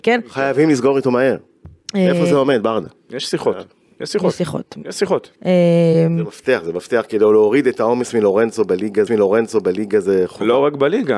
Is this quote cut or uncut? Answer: cut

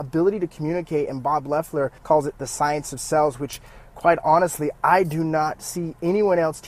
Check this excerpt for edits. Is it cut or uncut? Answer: cut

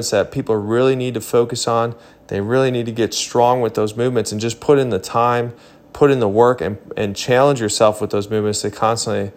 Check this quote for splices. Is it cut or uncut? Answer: uncut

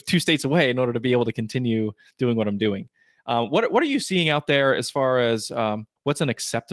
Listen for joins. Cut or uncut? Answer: uncut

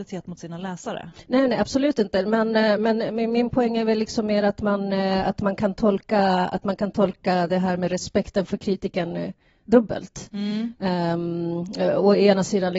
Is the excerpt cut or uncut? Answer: uncut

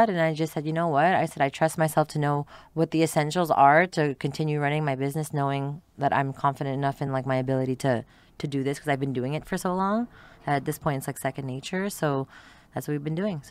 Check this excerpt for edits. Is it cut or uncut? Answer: uncut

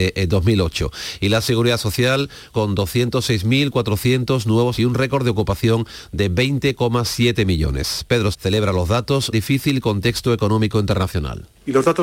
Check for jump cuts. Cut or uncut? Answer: cut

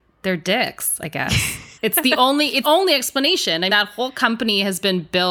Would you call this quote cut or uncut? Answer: cut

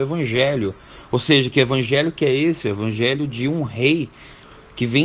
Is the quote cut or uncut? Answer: uncut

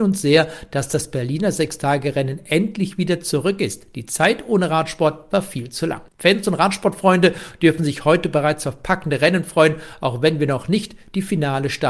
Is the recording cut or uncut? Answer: cut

